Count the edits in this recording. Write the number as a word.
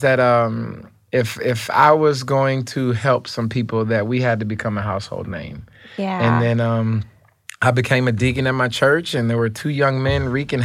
zero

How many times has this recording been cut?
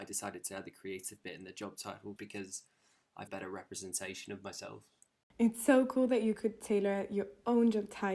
two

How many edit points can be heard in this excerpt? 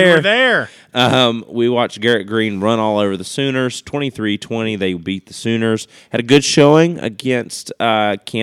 zero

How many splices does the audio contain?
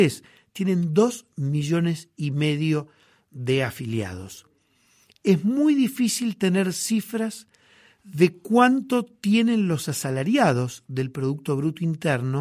zero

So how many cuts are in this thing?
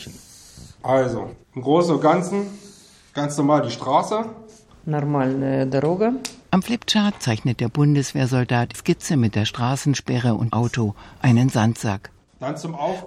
four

